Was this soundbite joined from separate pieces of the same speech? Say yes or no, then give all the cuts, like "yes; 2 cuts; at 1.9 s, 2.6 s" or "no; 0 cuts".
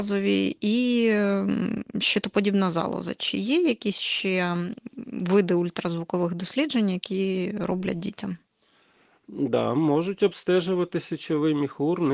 no; 0 cuts